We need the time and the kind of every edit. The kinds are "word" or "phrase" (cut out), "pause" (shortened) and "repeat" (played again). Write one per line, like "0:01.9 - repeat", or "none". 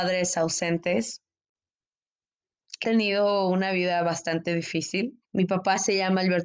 0:02.8 - word
0:05.2 - pause